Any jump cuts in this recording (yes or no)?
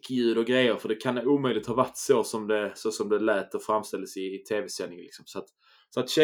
no